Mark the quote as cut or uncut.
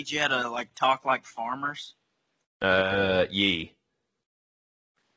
uncut